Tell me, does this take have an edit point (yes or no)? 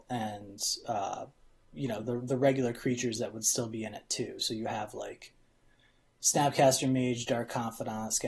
no